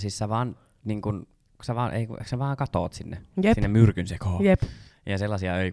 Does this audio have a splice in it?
no; 0 cuts

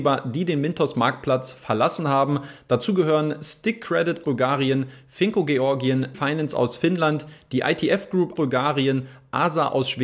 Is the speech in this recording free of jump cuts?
no; 3 cuts; at 4.2 s, 6.1 s, 8.4 s

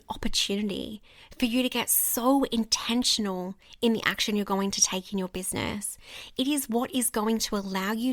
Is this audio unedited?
yes; 0 cuts

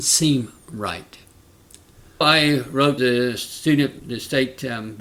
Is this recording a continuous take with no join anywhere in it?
no; 3 cuts; at 2.2 s, 3.0 s, 4.0 s

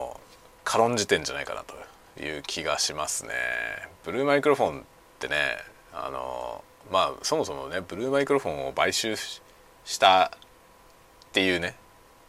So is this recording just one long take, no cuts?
yes; 0 cuts

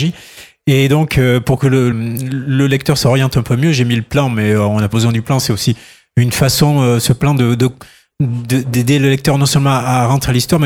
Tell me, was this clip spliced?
yes; 2 cuts; at 1.9 s, 4.9 s

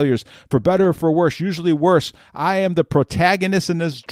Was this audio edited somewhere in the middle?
no; 0 cuts

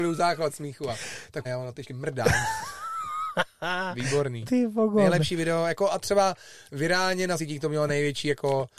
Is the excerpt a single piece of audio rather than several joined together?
no; 4 cuts; at 1.4 s, 1.9 s, 6.0 s, 7.4 s

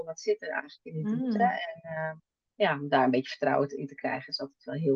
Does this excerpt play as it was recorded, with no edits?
yes; 0 cuts

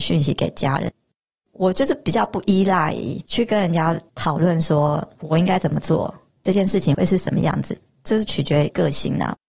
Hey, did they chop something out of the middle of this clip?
no; 0 cuts

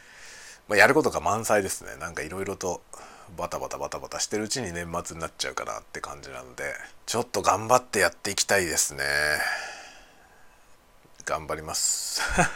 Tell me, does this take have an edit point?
yes; 1 cut; at 7.0 s

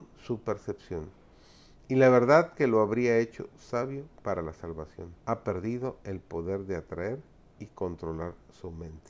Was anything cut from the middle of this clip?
yes; 1 cut; at 5.2 s

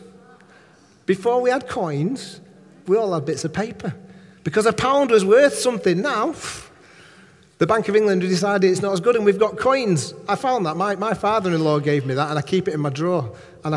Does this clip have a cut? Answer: no; 0 cuts

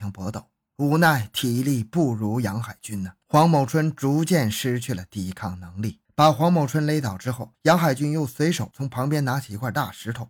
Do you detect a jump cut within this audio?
yes; 3 cuts; at 3.2 s, 6.1 s, 7.5 s

